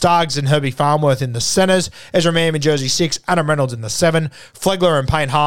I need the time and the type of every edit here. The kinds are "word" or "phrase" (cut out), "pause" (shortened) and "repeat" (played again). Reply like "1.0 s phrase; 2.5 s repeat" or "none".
none